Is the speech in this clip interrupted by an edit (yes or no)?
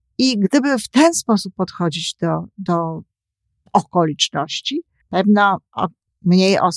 yes